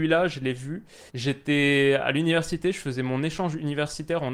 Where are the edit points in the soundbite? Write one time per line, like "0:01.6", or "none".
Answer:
0:01.1